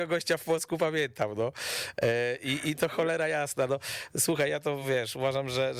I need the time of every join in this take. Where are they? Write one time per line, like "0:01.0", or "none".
none

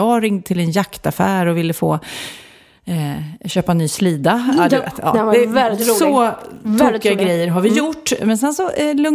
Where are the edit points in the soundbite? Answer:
none

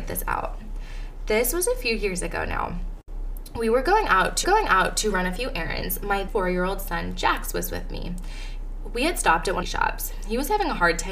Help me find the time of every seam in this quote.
0:04.4
0:06.3
0:09.6

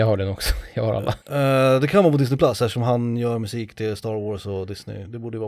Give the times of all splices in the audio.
0:01.2

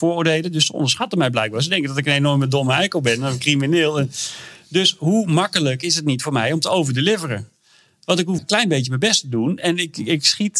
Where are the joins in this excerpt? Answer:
0:08.4

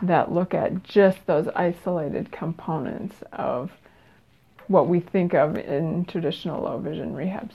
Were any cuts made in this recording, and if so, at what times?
none

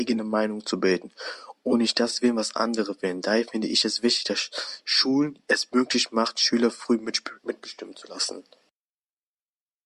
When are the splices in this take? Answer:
0:07.4

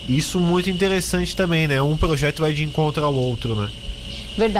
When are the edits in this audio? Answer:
none

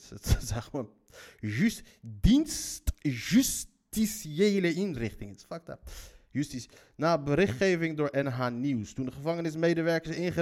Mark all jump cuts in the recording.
none

